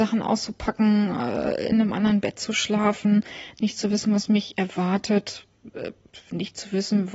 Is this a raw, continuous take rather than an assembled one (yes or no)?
yes